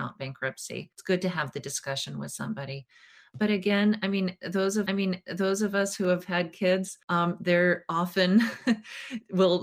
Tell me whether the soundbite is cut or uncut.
cut